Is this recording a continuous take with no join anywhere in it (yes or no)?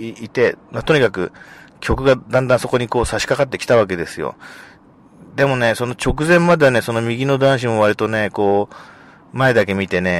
yes